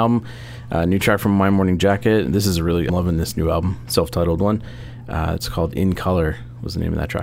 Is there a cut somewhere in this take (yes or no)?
yes